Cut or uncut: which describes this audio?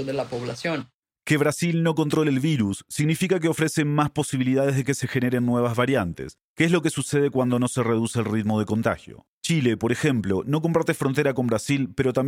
cut